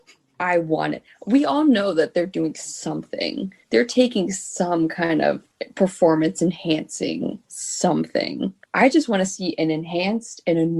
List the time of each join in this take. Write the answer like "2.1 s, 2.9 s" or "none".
3.6 s